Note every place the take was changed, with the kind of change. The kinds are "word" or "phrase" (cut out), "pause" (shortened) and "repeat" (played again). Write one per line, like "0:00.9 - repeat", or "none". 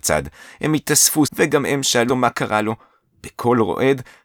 0:01.2 - word
0:02.1 - word